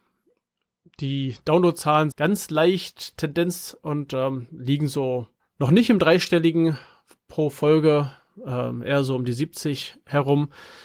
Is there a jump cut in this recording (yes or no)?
yes